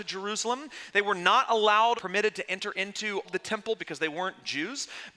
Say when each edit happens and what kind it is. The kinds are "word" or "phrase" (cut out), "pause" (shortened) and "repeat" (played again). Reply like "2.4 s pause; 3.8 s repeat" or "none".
2.0 s word; 3.2 s word; 3.8 s word